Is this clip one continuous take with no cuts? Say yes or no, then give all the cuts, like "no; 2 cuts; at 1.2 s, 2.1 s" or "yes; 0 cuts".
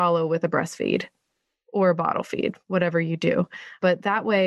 yes; 0 cuts